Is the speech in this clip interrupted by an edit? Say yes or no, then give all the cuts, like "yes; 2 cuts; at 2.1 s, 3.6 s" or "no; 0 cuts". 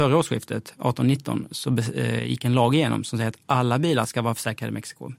no; 0 cuts